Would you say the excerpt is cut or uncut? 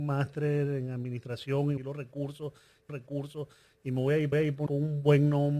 cut